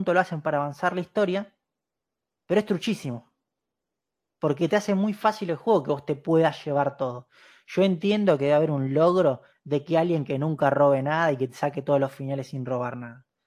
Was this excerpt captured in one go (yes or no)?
yes